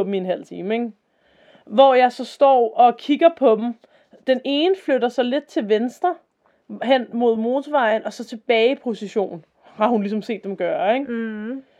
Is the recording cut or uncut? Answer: uncut